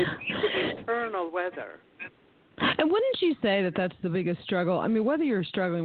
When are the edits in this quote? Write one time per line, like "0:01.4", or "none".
none